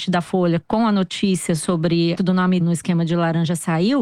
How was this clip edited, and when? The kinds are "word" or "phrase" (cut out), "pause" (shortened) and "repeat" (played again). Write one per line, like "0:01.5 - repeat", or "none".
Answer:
0:02.2 - word
0:02.6 - word